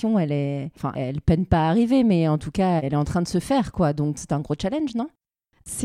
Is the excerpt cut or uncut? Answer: uncut